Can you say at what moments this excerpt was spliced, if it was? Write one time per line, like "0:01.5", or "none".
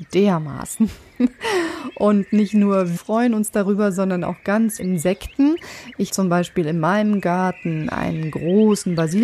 0:03.0
0:04.8
0:06.1